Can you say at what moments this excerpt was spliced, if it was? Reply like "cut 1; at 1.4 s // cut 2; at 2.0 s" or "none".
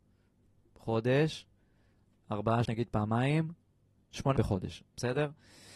cut 1; at 2.7 s // cut 2; at 4.4 s